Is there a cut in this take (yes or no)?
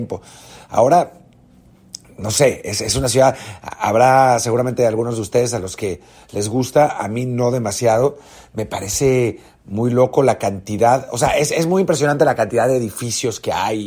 no